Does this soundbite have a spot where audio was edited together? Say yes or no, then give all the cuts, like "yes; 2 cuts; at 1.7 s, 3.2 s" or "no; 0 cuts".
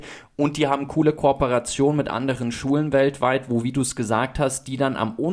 no; 0 cuts